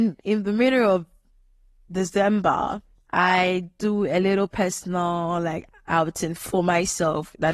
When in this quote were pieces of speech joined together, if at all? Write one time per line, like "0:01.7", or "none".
0:03.0